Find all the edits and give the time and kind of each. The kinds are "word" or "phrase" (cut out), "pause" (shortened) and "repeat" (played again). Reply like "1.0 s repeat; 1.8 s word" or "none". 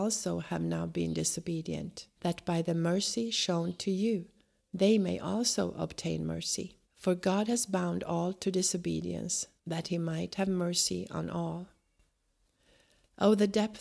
2.2 s pause; 6.8 s pause; 9.6 s pause